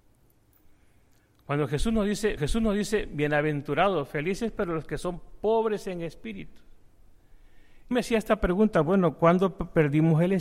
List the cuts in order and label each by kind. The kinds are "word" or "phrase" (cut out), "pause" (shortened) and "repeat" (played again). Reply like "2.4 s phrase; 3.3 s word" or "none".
2.4 s repeat; 7.9 s phrase